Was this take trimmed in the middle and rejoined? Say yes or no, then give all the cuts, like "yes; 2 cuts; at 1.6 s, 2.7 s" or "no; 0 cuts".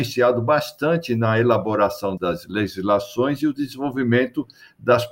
yes; 1 cut; at 2.2 s